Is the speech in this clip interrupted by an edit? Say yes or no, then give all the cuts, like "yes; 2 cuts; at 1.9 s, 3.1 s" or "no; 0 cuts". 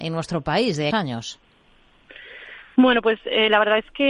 yes; 2 cuts; at 0.9 s, 2.6 s